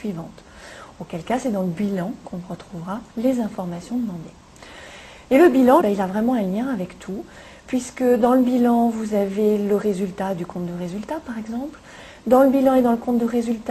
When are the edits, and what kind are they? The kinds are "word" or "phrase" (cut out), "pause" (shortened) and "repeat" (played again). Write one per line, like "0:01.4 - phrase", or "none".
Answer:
0:03.1 - pause
0:05.8 - phrase